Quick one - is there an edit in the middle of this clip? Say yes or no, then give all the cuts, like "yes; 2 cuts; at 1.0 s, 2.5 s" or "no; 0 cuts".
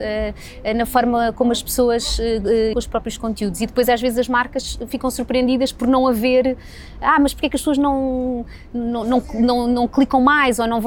yes; 1 cut; at 2.7 s